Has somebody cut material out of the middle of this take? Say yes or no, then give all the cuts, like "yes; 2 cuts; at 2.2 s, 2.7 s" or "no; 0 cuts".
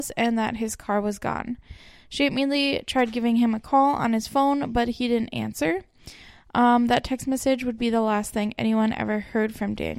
no; 0 cuts